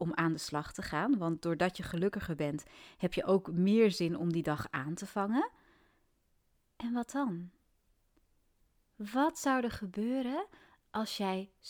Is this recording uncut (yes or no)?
yes